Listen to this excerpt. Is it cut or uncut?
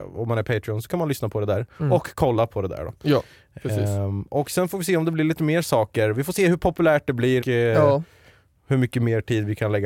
cut